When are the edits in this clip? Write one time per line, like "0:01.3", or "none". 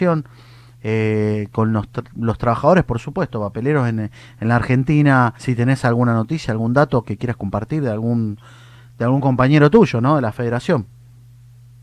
0:05.4

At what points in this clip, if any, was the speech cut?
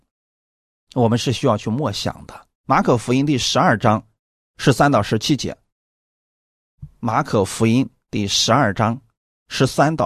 0:02.6

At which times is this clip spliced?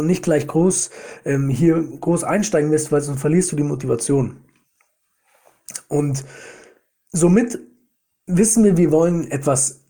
none

